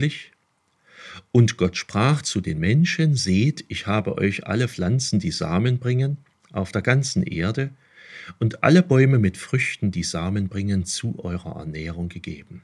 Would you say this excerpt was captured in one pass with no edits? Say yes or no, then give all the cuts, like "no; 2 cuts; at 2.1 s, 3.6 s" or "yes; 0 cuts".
yes; 0 cuts